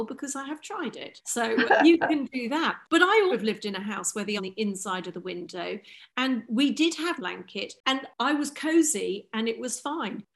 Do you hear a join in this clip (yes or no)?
yes